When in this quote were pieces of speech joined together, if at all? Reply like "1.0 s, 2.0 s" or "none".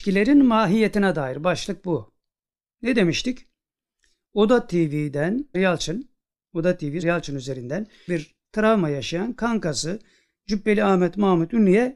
5.5 s, 7.0 s, 8.1 s